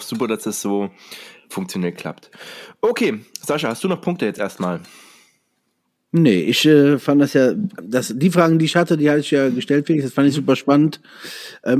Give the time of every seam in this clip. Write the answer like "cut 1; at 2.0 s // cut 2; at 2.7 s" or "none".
none